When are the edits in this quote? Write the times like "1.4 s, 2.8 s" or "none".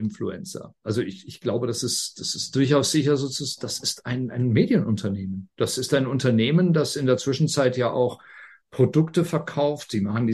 none